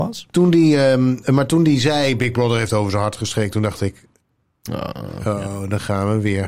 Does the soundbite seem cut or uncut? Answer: uncut